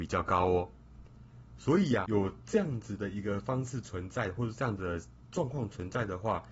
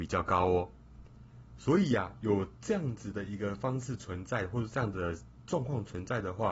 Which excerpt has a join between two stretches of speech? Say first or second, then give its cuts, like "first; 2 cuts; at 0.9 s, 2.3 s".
first; 1 cut; at 2.1 s